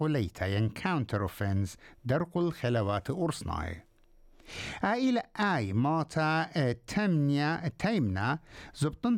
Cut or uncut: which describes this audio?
uncut